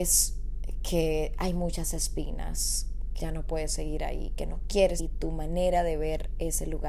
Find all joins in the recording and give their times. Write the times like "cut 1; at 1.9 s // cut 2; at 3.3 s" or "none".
cut 1; at 3.2 s // cut 2; at 5.0 s